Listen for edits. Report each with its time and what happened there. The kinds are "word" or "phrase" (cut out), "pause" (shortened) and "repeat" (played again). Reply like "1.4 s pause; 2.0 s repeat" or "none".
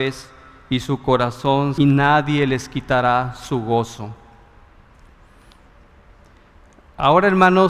1.8 s phrase

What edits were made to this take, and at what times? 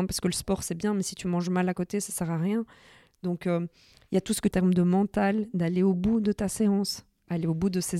4.5 s phrase

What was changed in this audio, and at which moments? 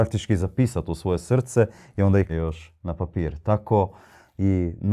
2.3 s word

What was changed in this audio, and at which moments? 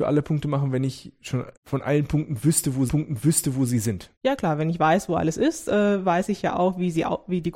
1.6 s pause; 2.9 s repeat; 4.2 s pause

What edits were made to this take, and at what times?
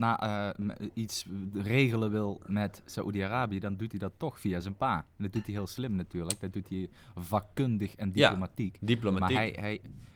none

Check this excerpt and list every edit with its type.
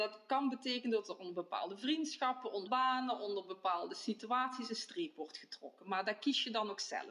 2.7 s word

